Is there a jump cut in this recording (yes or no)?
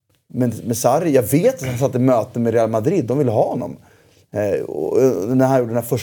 no